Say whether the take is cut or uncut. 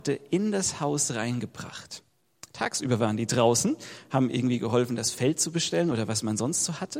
uncut